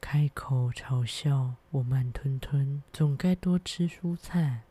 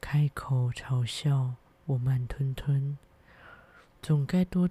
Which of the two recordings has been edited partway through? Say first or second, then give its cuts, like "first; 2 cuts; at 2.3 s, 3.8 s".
first; 2 cuts; at 1.6 s, 2.9 s